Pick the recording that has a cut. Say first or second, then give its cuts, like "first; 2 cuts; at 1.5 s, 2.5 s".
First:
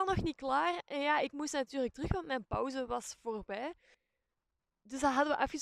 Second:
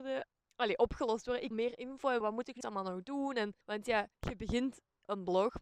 second; 5 cuts; at 1.5 s, 2.2 s, 2.6 s, 3.6 s, 4.1 s